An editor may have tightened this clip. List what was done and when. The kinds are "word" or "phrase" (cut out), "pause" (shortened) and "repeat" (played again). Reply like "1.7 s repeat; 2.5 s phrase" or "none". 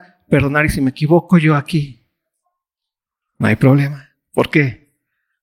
none